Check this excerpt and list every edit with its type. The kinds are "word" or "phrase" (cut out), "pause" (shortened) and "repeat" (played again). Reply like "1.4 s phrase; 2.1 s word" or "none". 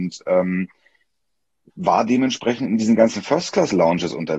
none